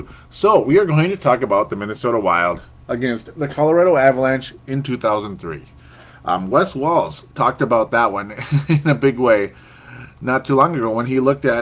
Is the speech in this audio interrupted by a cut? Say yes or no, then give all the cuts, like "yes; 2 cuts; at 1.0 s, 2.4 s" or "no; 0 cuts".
no; 0 cuts